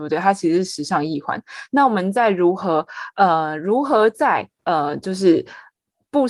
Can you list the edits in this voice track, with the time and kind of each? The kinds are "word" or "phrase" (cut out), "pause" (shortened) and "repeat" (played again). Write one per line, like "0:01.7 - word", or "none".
0:04.5 - pause

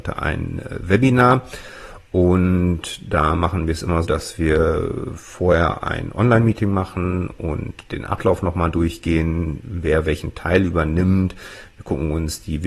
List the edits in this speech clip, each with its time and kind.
0:04.0 - word

